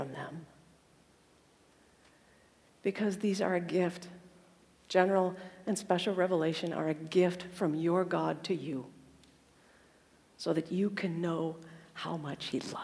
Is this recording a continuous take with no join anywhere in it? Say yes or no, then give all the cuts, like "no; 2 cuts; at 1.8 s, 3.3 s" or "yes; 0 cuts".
yes; 0 cuts